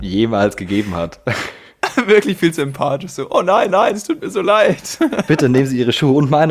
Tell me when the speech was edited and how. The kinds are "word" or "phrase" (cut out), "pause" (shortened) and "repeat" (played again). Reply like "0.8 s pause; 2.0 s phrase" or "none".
3.7 s repeat

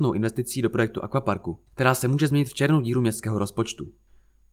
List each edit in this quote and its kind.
1.7 s pause

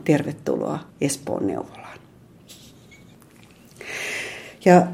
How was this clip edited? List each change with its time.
0.9 s pause

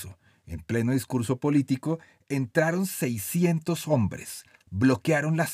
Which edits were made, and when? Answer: none

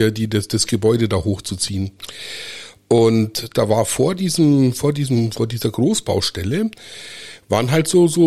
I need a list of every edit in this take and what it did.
none

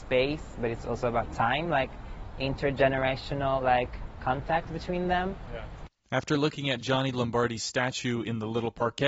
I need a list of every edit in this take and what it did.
none

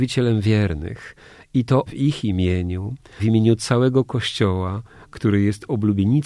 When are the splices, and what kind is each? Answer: 1.9 s word; 3.2 s word

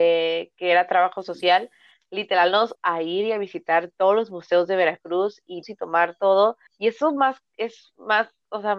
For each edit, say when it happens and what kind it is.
2.7 s word; 5.6 s phrase; 6.7 s pause

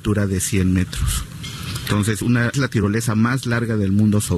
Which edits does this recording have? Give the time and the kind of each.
2.2 s word; 2.5 s word

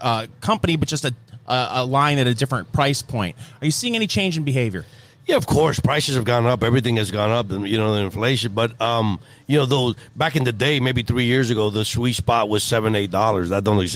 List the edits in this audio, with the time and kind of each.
none

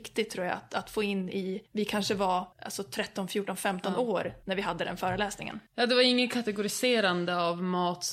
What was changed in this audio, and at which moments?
1.7 s pause; 2.5 s pause; 4.4 s pause; 5.7 s pause

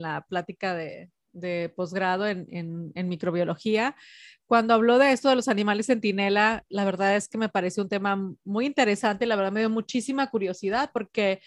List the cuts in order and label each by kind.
6.7 s word

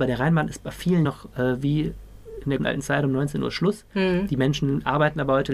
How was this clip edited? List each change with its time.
1.0 s word; 2.6 s word

